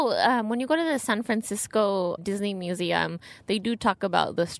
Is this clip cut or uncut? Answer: cut